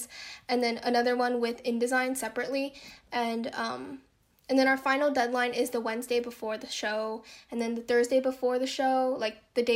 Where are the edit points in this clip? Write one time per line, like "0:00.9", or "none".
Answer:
none